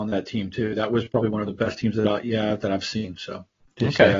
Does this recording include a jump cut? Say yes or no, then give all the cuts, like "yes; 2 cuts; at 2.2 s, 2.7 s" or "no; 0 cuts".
no; 0 cuts